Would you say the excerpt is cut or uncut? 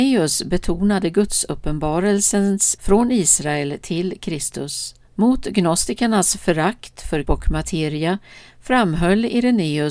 cut